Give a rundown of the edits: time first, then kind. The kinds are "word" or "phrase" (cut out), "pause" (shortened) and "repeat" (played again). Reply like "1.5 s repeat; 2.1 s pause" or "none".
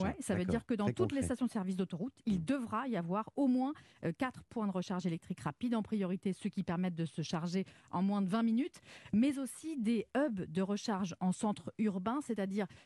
none